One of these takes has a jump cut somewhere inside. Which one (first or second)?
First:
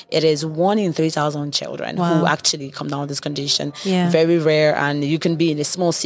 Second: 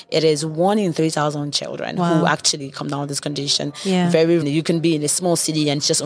second